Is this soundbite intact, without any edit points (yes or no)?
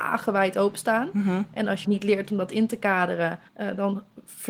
no